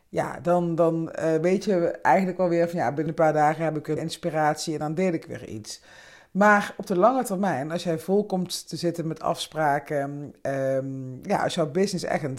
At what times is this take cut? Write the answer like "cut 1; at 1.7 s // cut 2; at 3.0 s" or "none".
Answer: cut 1; at 3.1 s // cut 2; at 4.0 s

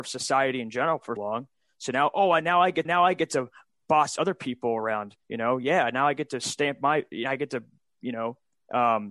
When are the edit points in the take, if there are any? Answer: cut 1; at 1.2 s // cut 2; at 2.8 s // cut 3; at 5.2 s

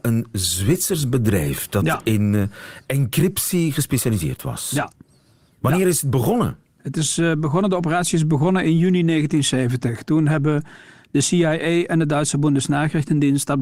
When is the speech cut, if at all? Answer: none

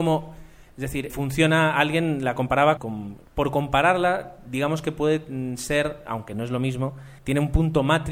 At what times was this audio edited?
cut 1; at 1.1 s // cut 2; at 2.8 s // cut 3; at 3.3 s // cut 4; at 7.2 s

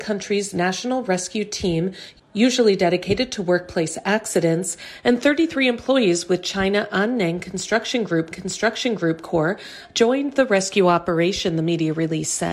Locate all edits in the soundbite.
cut 1; at 8.3 s

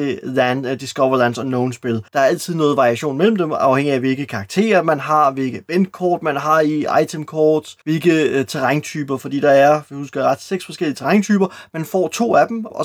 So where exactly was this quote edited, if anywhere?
cut 1; at 2.1 s // cut 2; at 7.8 s

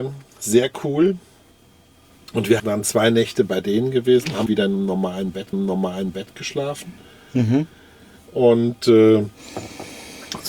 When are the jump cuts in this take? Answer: cut 1; at 2.6 s // cut 2; at 4.5 s // cut 3; at 5.5 s

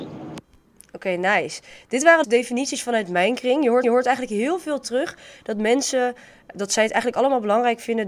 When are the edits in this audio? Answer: cut 1; at 2.2 s // cut 2; at 3.8 s // cut 3; at 6.5 s

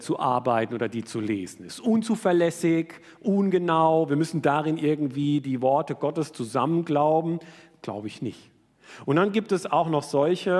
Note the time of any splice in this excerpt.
none

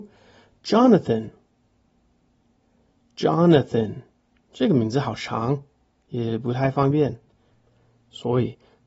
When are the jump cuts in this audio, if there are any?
none

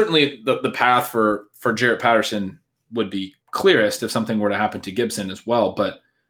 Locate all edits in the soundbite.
cut 1; at 3.4 s

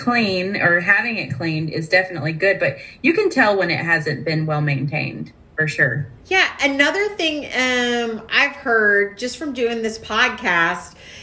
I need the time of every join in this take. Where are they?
cut 1; at 6.2 s

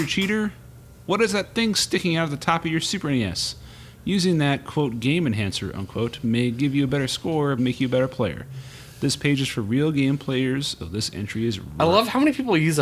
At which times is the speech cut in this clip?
cut 1; at 7.6 s // cut 2; at 10.8 s

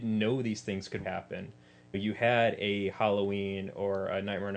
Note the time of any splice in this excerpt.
cut 1; at 1.0 s // cut 2; at 1.9 s

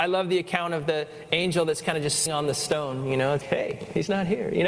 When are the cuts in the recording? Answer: cut 1; at 2.3 s // cut 2; at 3.4 s

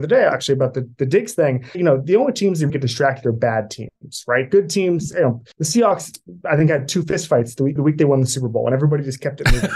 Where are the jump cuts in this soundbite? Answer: cut 1; at 1.7 s // cut 2; at 2.7 s // cut 3; at 5.5 s // cut 4; at 7.8 s

